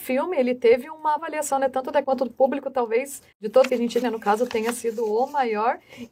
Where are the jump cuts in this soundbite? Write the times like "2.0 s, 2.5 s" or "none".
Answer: 1.2 s, 2.0 s, 3.3 s, 3.7 s, 4.0 s